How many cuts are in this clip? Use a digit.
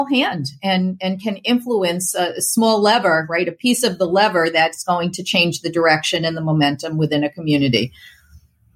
0